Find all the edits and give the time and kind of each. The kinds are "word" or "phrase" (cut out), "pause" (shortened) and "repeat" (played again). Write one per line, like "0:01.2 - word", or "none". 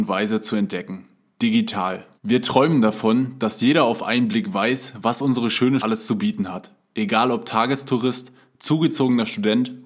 0:02.2 - pause
0:05.8 - word